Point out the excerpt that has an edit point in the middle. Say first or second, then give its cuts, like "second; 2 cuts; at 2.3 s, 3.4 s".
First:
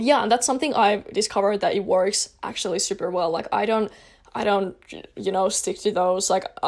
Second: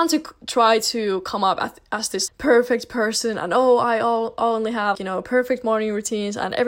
second; 2 cuts; at 2.3 s, 4.9 s